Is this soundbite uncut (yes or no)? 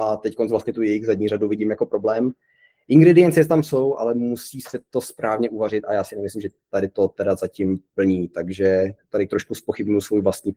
yes